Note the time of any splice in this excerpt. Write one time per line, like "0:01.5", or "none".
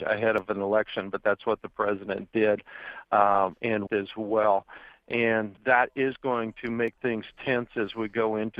0:03.9
0:05.6